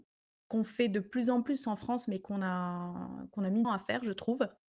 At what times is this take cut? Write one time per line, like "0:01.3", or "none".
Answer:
0:03.6